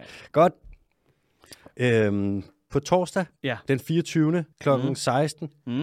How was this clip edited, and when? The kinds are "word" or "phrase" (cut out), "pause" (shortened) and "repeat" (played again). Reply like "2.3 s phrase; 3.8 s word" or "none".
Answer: 3.4 s pause; 4.5 s pause

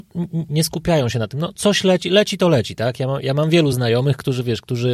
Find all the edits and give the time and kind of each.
none

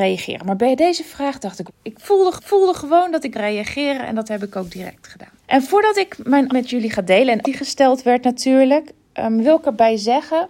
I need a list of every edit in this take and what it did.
1.7 s word; 2.4 s repeat; 3.3 s word; 5.4 s pause; 6.5 s word; 7.4 s phrase

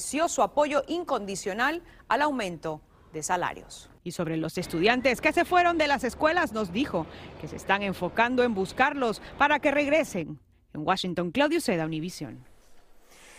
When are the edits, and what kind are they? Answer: none

